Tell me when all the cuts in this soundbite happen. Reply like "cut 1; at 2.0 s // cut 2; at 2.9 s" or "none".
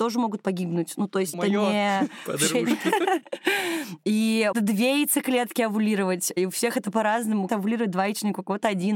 cut 1; at 1.3 s // cut 2; at 4.5 s // cut 3; at 7.5 s